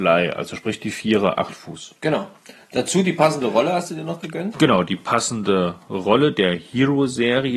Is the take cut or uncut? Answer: cut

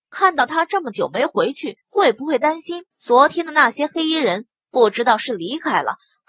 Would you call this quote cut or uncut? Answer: cut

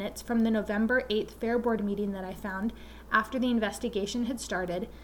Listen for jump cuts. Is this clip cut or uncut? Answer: uncut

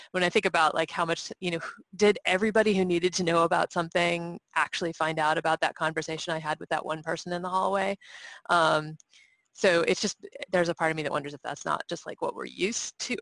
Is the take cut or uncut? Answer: uncut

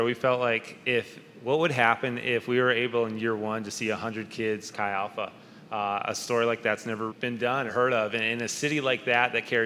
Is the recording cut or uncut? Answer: cut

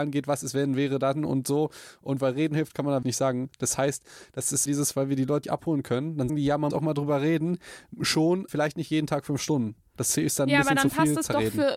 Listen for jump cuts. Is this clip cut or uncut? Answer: cut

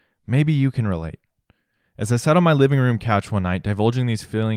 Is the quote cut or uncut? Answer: uncut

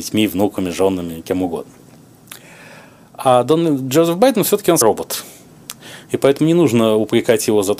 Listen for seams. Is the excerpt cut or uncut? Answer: cut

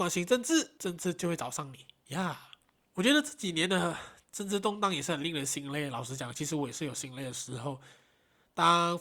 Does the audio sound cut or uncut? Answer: uncut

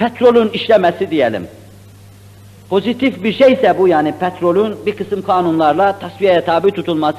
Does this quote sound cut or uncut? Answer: uncut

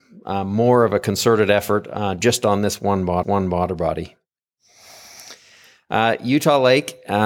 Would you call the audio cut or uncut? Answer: cut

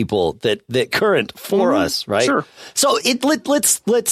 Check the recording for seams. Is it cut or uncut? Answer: cut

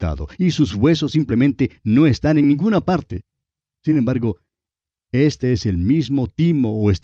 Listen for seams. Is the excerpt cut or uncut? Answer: uncut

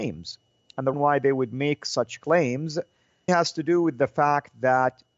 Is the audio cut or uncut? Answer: cut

